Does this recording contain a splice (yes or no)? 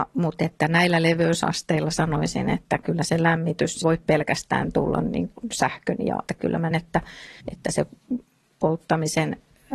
yes